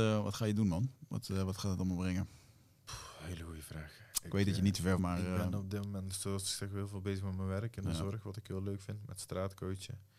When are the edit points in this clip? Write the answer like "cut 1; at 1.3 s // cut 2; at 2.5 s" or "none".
cut 1; at 5.0 s